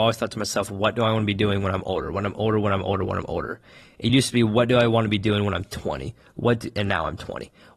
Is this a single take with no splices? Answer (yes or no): yes